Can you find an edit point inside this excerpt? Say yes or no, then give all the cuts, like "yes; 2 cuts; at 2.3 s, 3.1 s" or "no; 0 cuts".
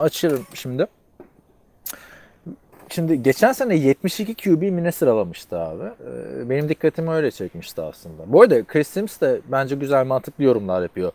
yes; 1 cut; at 6.0 s